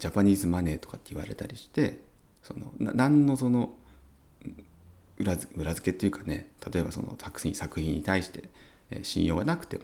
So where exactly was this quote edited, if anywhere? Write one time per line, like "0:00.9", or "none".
none